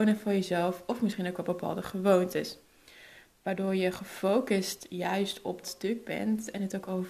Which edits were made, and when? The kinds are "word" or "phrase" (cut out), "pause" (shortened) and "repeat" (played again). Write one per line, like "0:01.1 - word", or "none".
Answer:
0:05.6 - word